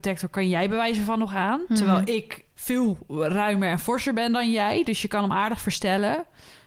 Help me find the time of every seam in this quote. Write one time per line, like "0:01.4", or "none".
0:02.5